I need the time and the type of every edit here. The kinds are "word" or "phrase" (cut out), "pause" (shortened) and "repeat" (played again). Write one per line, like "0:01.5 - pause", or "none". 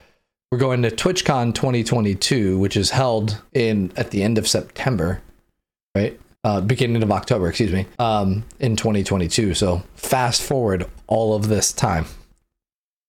0:03.5 - pause
0:06.3 - pause
0:07.9 - pause